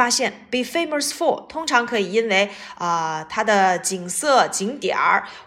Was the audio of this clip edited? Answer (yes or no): no